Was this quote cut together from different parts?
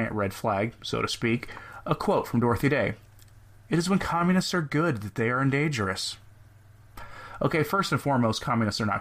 no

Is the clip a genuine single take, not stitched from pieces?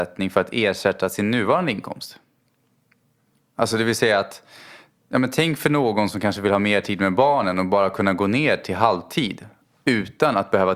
yes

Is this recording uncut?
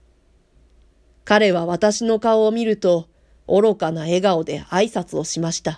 yes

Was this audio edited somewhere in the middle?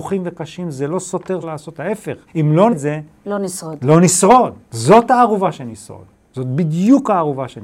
yes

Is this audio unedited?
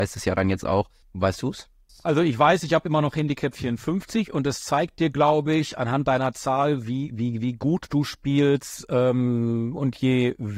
yes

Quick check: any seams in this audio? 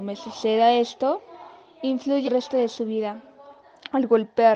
yes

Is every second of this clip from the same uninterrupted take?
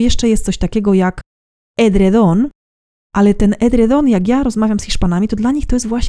yes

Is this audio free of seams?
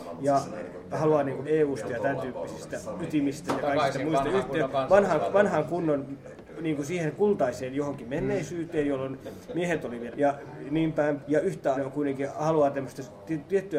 no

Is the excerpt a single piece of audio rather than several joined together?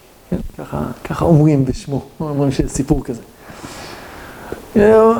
yes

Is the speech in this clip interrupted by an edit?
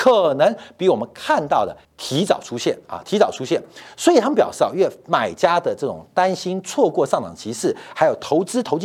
yes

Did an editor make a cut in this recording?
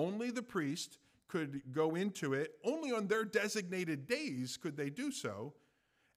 no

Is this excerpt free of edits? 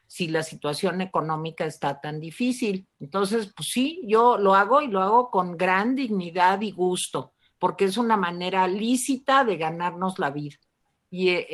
no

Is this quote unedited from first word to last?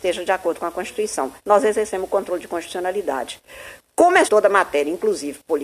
no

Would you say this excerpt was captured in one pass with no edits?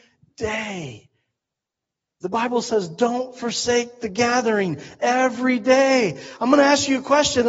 yes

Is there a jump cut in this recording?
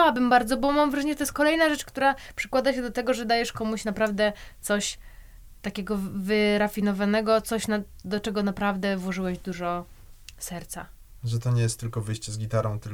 no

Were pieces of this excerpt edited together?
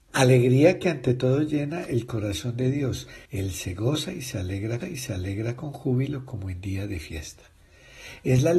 yes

